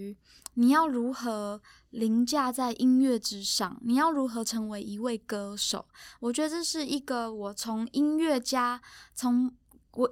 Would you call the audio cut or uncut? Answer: uncut